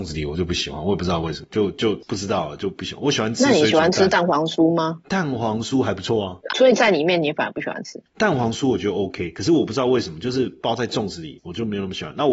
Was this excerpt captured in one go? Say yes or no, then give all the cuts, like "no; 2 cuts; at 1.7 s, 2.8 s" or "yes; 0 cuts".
no; 1 cut; at 6.5 s